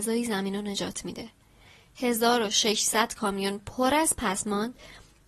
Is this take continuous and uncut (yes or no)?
yes